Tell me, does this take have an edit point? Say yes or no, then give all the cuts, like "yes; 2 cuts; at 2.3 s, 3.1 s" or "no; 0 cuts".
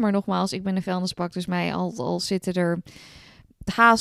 no; 0 cuts